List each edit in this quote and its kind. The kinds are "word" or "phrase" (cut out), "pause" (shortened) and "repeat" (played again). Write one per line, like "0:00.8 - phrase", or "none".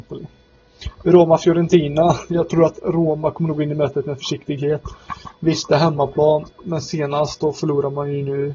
0:06.5 - pause